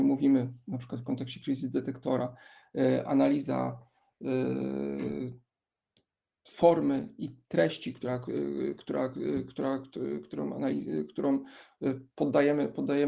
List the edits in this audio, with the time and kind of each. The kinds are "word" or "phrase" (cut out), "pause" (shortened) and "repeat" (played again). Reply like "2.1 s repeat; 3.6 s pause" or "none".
none